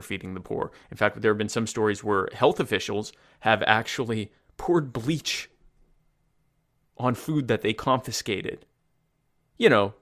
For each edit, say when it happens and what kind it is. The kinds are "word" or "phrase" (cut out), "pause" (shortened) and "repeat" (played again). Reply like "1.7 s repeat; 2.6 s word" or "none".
none